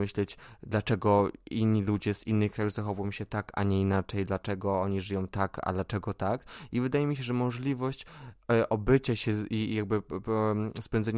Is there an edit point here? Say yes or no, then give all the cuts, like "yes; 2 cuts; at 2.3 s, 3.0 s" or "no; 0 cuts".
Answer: no; 0 cuts